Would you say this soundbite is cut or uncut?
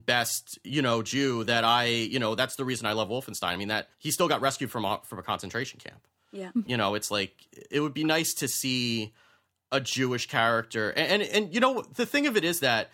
cut